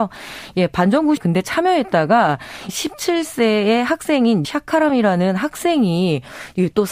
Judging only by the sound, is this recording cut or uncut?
cut